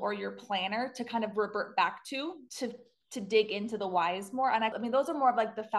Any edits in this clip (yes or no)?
yes